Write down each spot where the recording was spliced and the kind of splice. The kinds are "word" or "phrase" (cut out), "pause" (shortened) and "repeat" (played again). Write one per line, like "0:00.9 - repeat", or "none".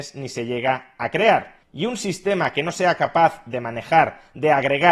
none